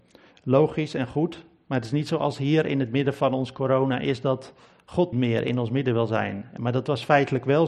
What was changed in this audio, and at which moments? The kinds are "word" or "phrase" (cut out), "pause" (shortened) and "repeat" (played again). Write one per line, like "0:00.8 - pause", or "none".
0:05.1 - word